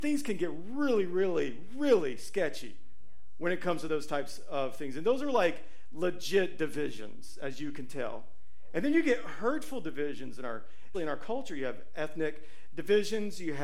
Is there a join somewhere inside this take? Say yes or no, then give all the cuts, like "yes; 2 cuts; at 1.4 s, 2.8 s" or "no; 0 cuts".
yes; 1 cut; at 10.9 s